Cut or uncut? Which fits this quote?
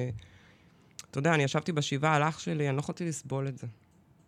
uncut